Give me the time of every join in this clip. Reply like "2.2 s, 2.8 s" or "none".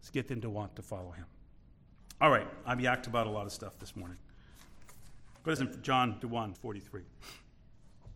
5.6 s, 6.2 s, 6.5 s